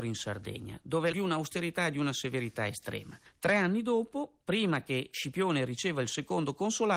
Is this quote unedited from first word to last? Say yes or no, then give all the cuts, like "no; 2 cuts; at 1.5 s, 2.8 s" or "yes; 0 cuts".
no; 2 cuts; at 1.1 s, 4.4 s